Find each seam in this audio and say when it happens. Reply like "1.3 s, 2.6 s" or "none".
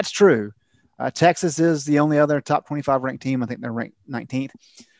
none